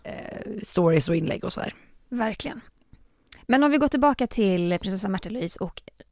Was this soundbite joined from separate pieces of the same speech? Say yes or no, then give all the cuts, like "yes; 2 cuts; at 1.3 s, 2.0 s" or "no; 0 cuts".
no; 0 cuts